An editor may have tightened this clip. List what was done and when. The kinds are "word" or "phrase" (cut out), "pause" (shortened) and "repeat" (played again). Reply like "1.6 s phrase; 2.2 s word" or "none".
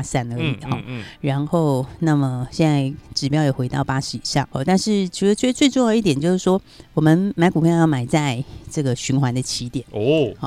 4.5 s word

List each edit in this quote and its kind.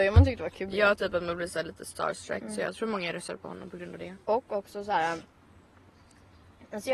4.2 s pause

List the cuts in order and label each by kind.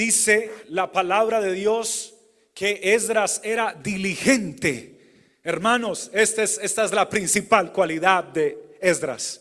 none

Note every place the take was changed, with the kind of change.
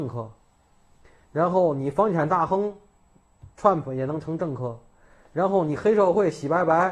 none

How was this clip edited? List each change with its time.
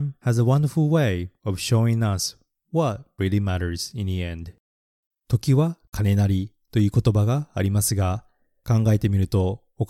none

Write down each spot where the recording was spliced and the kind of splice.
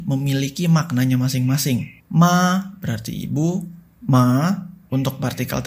2.0 s pause

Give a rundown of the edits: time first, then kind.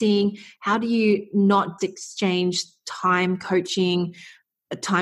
1.8 s word

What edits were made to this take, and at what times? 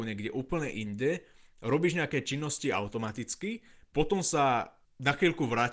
none

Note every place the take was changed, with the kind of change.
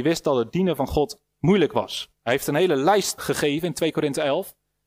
2.2 s pause; 3.2 s word

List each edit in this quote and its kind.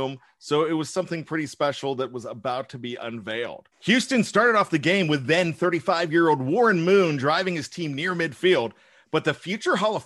3.7 s pause

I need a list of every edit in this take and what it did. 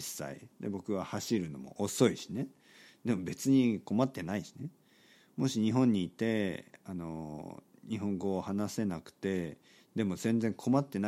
none

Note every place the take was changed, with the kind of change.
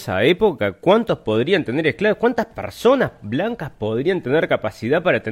none

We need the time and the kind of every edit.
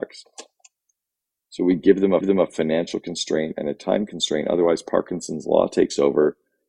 2.2 s repeat

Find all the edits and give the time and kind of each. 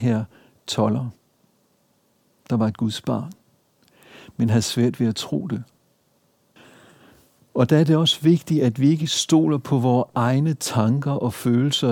none

